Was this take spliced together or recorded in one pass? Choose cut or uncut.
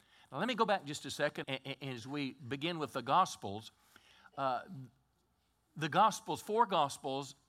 cut